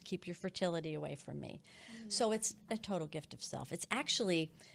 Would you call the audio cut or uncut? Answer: cut